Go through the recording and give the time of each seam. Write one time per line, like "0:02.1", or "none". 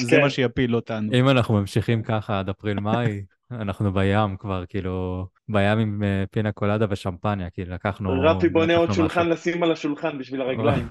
0:05.4